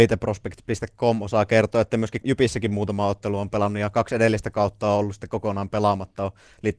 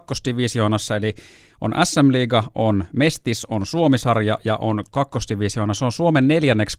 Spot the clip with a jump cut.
first; 1 cut; at 2.2 s

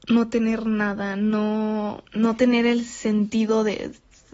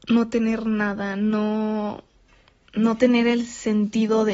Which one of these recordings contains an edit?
first; 1 cut; at 2.1 s

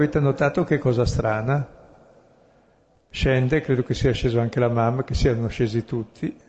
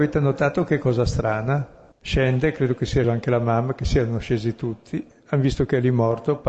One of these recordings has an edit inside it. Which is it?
second; 2 cuts; at 1.9 s, 3.0 s

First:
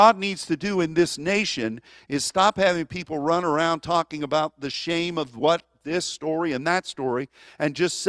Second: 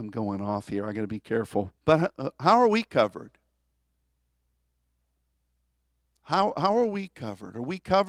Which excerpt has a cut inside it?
second; 1 cut; at 1.8 s

